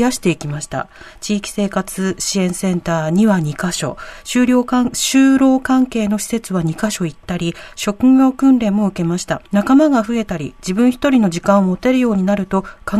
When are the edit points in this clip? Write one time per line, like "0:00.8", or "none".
0:09.5